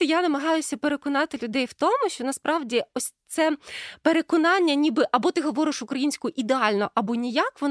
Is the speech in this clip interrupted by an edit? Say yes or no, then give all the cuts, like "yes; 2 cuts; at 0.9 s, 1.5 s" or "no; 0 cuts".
no; 0 cuts